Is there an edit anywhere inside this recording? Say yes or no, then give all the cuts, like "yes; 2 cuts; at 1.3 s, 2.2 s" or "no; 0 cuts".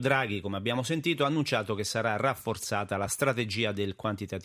no; 0 cuts